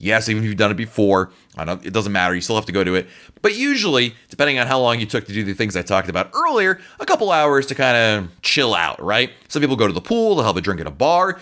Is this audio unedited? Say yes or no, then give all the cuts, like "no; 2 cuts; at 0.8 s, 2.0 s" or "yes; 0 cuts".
yes; 0 cuts